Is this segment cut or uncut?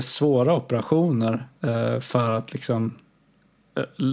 uncut